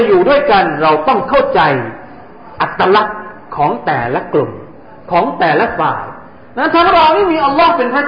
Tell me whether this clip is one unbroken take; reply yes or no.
yes